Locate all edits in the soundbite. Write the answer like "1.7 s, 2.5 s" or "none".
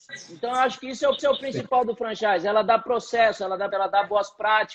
1.2 s, 3.7 s